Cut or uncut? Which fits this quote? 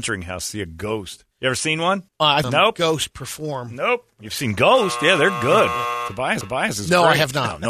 cut